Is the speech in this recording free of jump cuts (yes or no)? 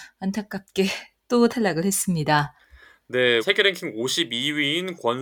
no